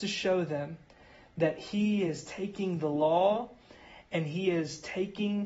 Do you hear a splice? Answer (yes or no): no